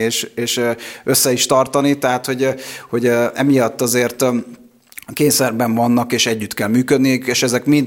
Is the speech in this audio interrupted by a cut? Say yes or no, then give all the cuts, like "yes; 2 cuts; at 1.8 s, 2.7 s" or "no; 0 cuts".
no; 0 cuts